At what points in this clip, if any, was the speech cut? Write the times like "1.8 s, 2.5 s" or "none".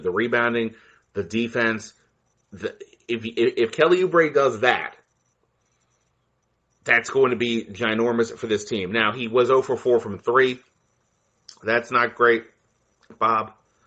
none